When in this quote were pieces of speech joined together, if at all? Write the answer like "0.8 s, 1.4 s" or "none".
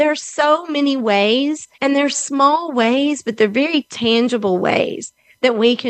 1.7 s